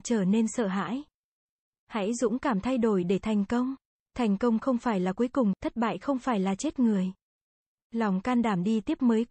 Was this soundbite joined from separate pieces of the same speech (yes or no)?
no